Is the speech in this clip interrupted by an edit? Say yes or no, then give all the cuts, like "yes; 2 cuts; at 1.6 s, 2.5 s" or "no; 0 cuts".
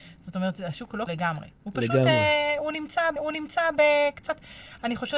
yes; 2 cuts; at 1.1 s, 3.2 s